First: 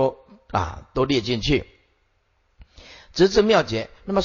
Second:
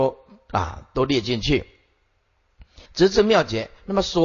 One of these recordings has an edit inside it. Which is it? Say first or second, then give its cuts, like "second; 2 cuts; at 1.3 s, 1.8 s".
second; 1 cut; at 2.8 s